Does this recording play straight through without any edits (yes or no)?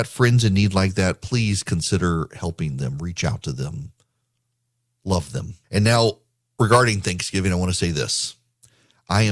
no